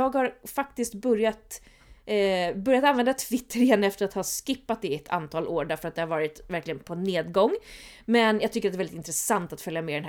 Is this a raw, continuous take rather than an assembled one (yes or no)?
yes